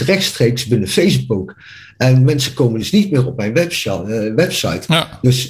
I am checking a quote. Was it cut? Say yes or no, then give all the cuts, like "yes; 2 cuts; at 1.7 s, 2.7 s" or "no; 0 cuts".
no; 0 cuts